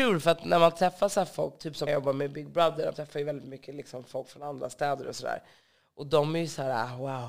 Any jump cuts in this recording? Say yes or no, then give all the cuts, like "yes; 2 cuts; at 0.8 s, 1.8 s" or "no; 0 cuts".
yes; 2 cuts; at 1.9 s, 2.9 s